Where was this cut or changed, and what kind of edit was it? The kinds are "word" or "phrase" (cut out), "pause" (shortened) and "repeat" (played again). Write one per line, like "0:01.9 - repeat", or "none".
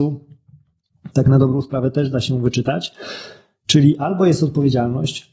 none